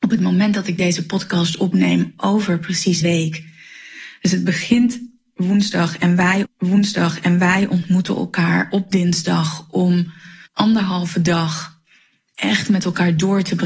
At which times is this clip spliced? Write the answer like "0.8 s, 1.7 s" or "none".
3.0 s, 6.5 s, 10.5 s